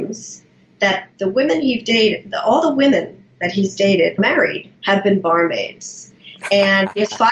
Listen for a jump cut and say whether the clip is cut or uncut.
cut